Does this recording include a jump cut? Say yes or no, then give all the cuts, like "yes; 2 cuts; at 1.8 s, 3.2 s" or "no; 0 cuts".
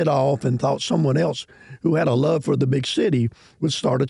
no; 0 cuts